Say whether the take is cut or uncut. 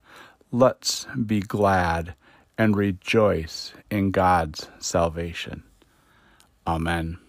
cut